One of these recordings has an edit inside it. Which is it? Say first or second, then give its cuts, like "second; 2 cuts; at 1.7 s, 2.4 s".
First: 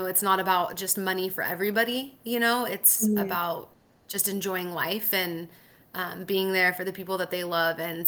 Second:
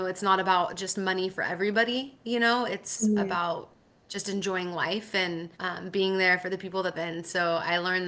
second; 2 cuts; at 5.5 s, 6.9 s